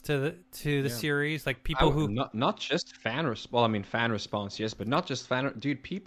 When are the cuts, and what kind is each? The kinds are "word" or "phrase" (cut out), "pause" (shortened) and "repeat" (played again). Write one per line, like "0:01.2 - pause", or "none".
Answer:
none